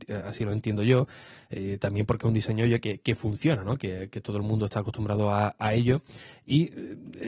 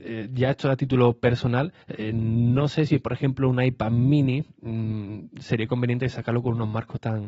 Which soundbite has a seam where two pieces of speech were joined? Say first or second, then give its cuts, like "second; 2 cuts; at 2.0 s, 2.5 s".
second; 1 cut; at 1.8 s